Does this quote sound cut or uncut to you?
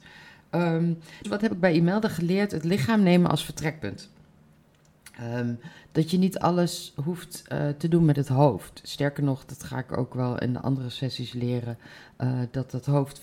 cut